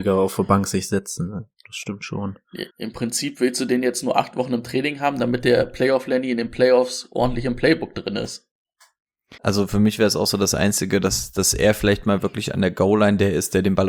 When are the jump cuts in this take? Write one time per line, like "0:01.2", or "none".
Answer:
0:02.7
0:09.4